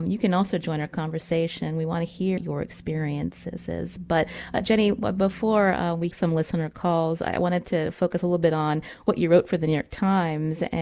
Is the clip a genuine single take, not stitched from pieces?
no; 2 cuts; at 2.4 s, 6.1 s

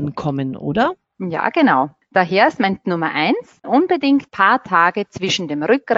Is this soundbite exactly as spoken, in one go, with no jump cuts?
no; 3 cuts; at 2.8 s, 3.6 s, 4.3 s

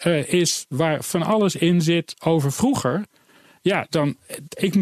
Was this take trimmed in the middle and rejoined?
no; 0 cuts

